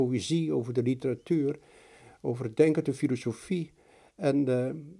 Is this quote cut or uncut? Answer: uncut